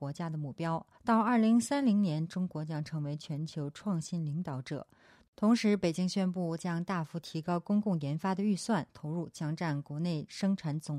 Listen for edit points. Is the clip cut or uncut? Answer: cut